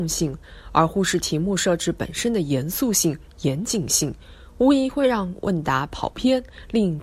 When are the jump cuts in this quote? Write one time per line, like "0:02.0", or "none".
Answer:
none